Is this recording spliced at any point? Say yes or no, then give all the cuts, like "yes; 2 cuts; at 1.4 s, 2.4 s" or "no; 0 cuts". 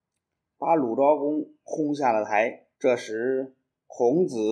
yes; 1 cut; at 2.7 s